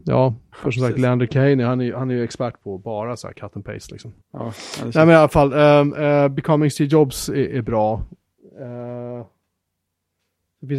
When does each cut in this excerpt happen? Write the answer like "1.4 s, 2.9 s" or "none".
4.2 s